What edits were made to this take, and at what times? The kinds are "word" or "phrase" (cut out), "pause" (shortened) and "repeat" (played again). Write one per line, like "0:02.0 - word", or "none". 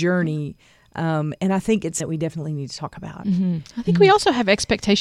0:02.0 - word